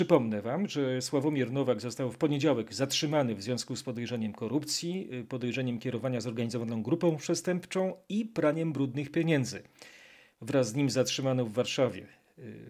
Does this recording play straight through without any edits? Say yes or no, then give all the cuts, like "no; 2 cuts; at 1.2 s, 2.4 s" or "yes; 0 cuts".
yes; 0 cuts